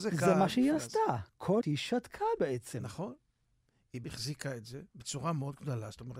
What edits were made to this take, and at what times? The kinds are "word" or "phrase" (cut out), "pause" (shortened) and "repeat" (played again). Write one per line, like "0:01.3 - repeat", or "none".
0:01.6 - word
0:04.0 - word
0:04.9 - pause